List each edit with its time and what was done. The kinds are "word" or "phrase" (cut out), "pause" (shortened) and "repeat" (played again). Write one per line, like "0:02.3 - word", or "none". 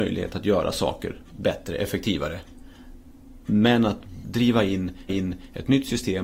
0:01.3 - word
0:04.2 - word
0:05.1 - repeat